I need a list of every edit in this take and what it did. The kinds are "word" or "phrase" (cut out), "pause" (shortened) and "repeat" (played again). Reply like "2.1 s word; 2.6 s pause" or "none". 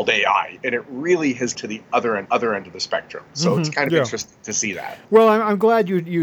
1.5 s word; 2.3 s repeat; 5.0 s pause